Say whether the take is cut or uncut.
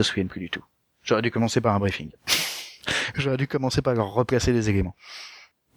uncut